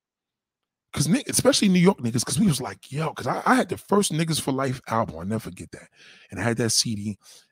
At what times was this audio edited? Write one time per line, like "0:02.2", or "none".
none